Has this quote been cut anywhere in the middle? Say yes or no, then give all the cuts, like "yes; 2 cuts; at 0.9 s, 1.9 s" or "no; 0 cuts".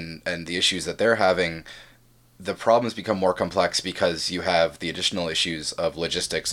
no; 0 cuts